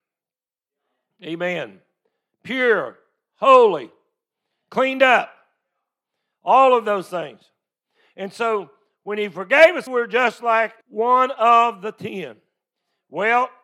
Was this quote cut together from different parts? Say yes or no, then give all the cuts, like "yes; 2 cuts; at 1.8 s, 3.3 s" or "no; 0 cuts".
yes; 2 cuts; at 9.9 s, 10.8 s